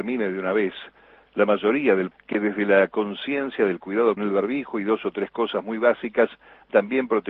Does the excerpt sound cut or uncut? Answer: cut